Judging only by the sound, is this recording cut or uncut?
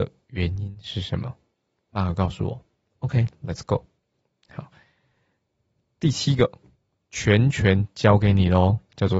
uncut